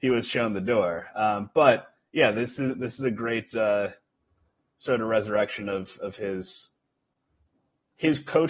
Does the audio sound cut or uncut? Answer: uncut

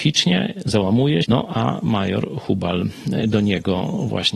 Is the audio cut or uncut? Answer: cut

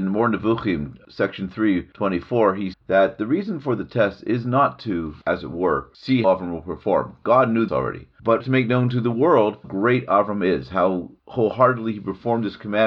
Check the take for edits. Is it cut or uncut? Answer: cut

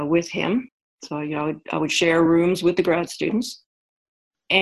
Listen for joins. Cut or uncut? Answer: uncut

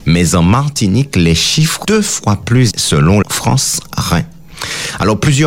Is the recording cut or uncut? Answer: cut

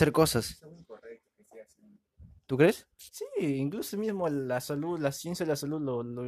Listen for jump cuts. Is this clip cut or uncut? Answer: uncut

